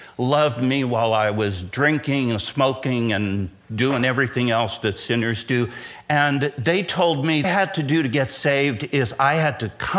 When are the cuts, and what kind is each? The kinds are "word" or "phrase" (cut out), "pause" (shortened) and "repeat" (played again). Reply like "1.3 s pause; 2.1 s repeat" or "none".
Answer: 7.4 s phrase